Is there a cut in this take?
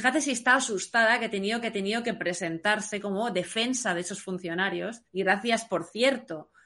yes; 2 cuts; at 1.6 s, 5.1 s

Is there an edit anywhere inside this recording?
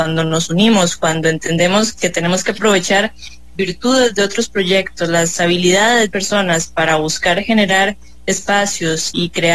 yes; 3 cuts; at 1.9 s, 3.6 s, 6.1 s

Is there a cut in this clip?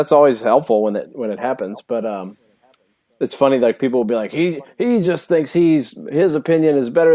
no; 0 cuts

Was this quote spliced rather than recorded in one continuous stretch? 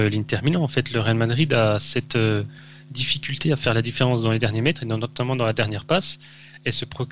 no; 0 cuts

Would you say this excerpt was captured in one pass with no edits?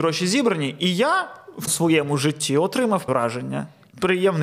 no; 2 cuts; at 1.7 s, 3.1 s

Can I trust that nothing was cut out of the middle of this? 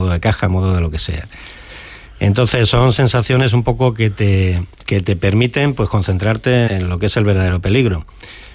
no; 2 cuts; at 4.7 s, 6.7 s

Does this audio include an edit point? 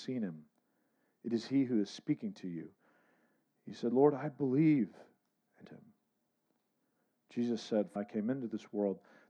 yes; 2 cuts; at 5.6 s, 8.0 s

